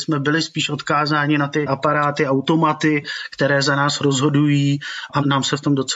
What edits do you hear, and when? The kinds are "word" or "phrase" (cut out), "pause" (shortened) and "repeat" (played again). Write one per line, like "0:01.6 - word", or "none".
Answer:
none